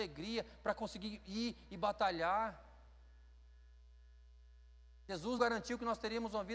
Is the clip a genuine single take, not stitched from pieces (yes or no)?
no